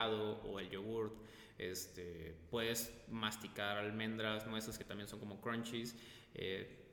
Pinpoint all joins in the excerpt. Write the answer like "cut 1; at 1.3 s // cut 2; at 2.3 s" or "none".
none